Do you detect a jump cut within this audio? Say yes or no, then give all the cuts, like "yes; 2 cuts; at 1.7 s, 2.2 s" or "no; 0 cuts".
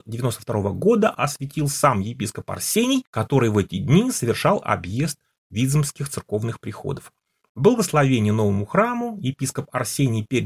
no; 0 cuts